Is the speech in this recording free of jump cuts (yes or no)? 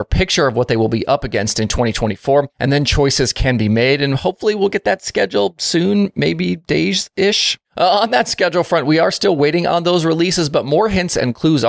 no